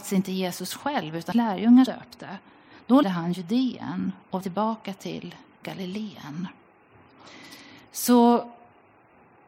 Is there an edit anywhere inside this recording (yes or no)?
yes